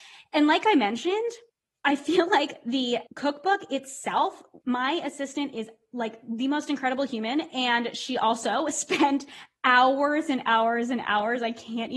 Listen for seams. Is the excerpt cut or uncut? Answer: cut